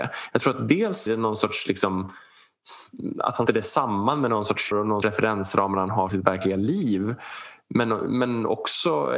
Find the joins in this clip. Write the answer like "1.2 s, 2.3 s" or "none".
1.1 s, 3.5 s, 4.7 s, 5.0 s, 6.1 s